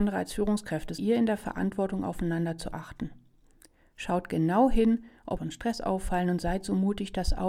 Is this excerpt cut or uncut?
cut